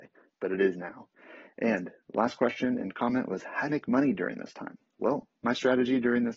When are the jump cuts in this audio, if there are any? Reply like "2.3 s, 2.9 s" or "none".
3.7 s